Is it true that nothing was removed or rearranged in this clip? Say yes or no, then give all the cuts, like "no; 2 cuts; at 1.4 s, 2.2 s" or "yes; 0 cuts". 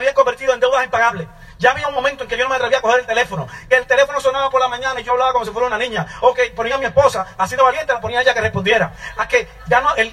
yes; 0 cuts